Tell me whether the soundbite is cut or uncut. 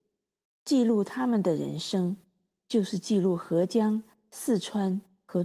uncut